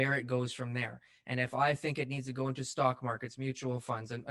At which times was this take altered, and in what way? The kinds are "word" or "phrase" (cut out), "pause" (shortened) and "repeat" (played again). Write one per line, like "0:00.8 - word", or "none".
none